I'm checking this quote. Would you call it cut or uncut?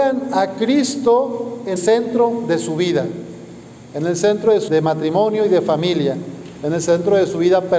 cut